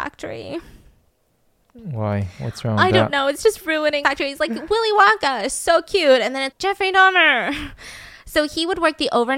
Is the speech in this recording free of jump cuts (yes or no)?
no